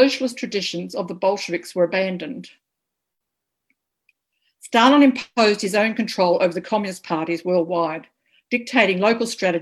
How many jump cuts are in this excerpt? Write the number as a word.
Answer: zero